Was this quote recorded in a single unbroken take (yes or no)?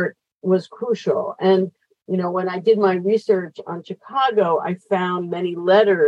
yes